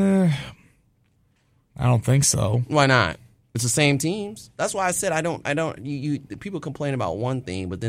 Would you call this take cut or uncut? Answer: uncut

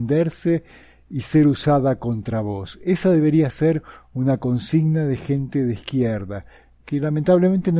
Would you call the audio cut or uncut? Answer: uncut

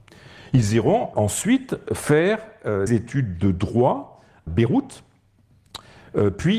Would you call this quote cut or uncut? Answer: cut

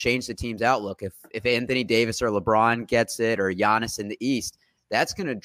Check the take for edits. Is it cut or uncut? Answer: uncut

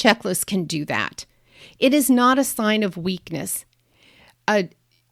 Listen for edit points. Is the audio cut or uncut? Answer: uncut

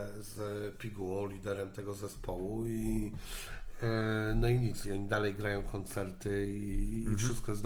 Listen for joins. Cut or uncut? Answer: uncut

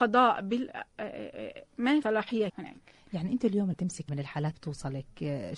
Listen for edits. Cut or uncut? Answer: cut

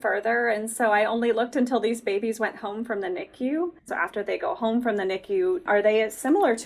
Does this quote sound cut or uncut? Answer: cut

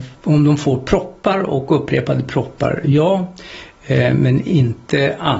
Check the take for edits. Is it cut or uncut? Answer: uncut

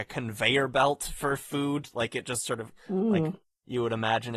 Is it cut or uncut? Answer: uncut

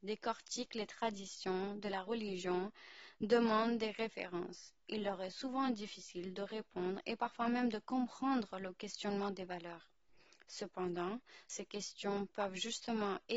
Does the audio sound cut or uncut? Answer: uncut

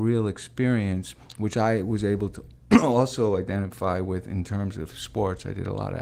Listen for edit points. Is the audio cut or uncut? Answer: uncut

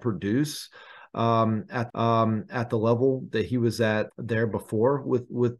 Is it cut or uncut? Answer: cut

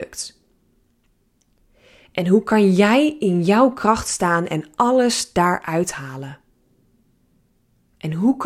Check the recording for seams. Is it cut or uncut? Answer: uncut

